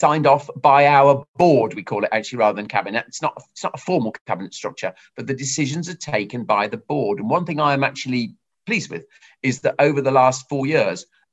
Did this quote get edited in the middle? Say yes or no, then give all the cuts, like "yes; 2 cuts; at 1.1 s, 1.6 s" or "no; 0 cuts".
no; 0 cuts